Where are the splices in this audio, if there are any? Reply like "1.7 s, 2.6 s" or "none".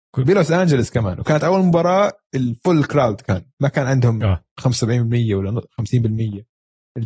3.5 s

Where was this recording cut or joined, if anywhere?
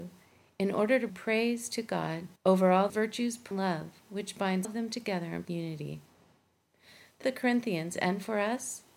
1.1 s, 2.4 s, 2.9 s, 3.5 s, 4.6 s, 5.4 s, 7.2 s

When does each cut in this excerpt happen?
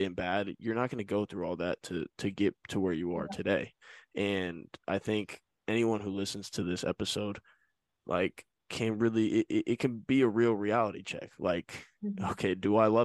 none

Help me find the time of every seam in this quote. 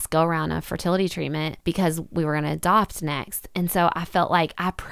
1.6 s

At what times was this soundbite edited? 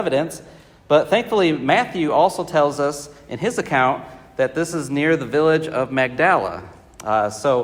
none

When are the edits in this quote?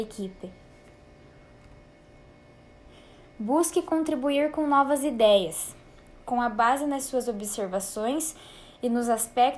none

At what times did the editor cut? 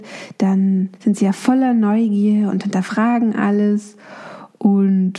0.9 s

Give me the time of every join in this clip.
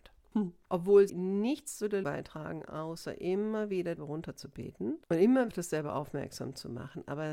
1.1 s, 2.0 s, 4.0 s, 5.0 s, 5.5 s

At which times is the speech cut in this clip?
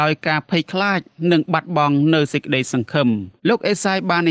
3.4 s

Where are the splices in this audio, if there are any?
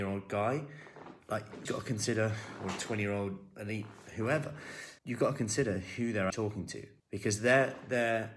1.7 s, 5.0 s, 6.3 s, 7.0 s

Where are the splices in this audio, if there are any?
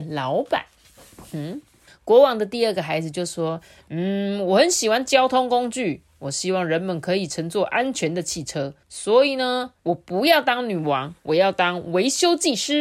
1.9 s, 8.8 s, 9.8 s

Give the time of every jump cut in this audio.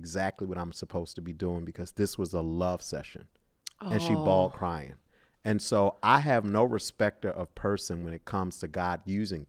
none

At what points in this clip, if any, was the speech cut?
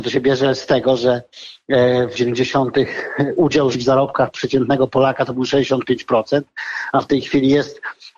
2.1 s, 3.7 s

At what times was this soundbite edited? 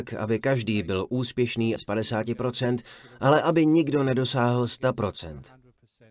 1.8 s

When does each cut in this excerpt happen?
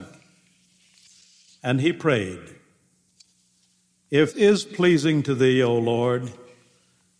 4.3 s

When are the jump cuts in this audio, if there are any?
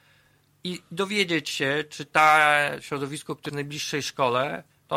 3.5 s

